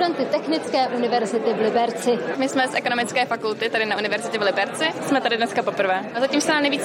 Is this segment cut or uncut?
uncut